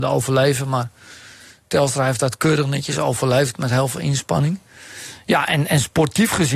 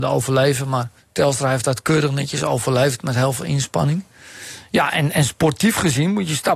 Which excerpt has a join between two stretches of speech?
second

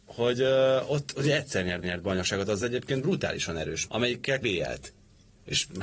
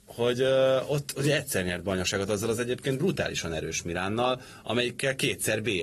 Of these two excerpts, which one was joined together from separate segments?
first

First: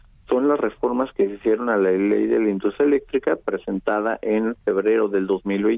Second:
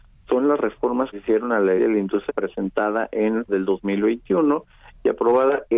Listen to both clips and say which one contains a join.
second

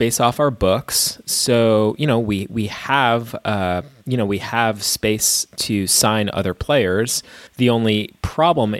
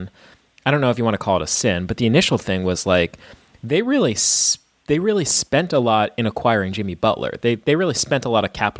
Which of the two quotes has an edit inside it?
first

